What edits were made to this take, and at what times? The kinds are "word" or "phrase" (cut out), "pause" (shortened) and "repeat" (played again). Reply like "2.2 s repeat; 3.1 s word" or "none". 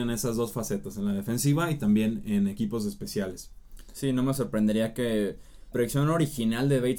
5.7 s word

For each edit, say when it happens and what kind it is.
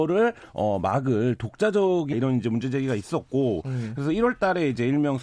2.1 s phrase

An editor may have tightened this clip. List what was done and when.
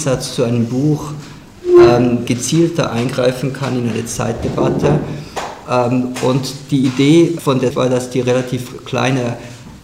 2.3 s phrase; 7.4 s word; 7.7 s word

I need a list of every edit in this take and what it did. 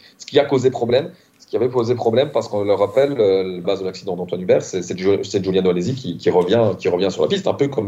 3.6 s phrase

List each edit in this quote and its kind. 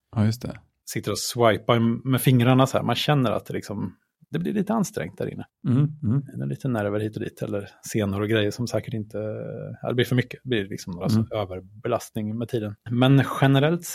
11.0 s word

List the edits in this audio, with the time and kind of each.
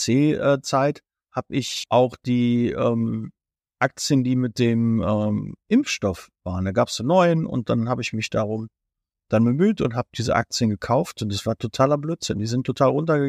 9.2 s word

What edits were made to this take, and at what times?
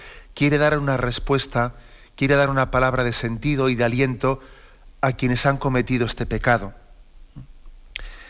none

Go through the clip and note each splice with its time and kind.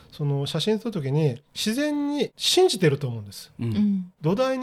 none

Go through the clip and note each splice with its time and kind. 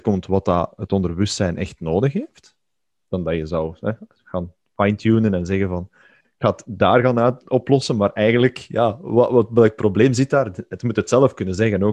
none

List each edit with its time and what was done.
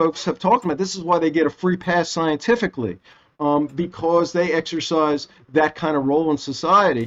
none

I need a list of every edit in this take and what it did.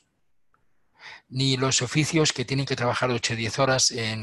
none

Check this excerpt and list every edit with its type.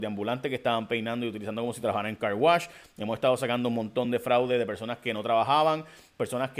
none

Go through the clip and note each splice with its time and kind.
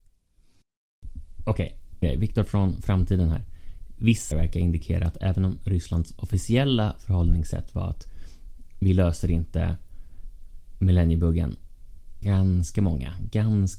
2.0 s word; 4.3 s word; 12.2 s phrase

